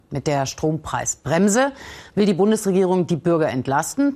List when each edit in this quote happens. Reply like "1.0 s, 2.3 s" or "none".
none